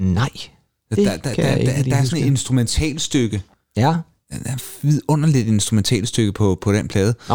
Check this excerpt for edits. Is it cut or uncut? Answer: uncut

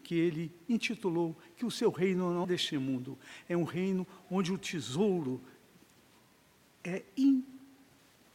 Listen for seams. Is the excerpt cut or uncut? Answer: cut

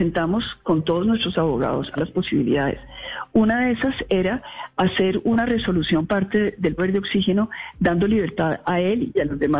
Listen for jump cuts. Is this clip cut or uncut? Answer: cut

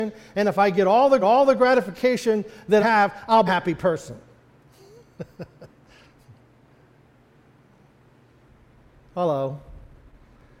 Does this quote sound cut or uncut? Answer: cut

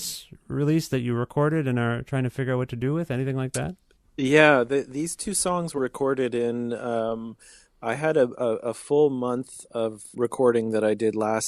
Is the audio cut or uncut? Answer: cut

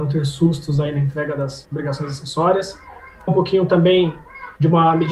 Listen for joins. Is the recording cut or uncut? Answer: cut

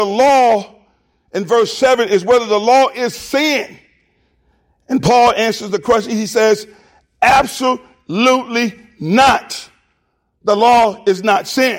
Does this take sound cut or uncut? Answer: uncut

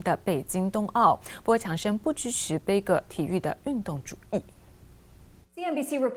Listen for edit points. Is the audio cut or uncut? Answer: uncut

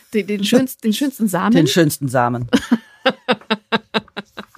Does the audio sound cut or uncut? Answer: uncut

